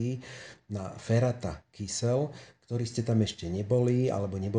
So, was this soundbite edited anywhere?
no; 0 cuts

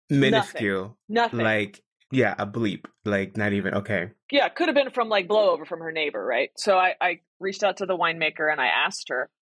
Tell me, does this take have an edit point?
no; 0 cuts

